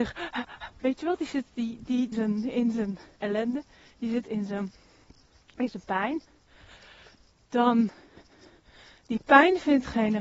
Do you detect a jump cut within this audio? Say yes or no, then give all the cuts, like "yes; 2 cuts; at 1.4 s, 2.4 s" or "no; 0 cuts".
yes; 2 cuts; at 2.1 s, 3.2 s